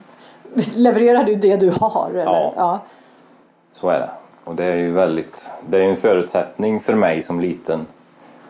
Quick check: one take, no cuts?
yes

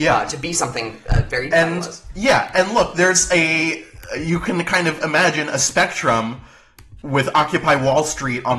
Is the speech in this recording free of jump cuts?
no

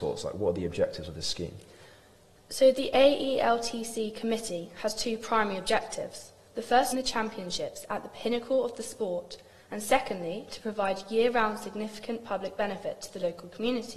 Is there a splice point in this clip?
yes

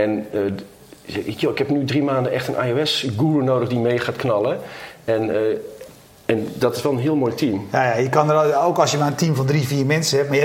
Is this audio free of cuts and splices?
yes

